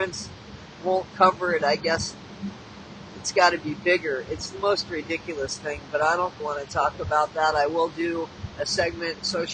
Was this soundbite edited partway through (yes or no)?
yes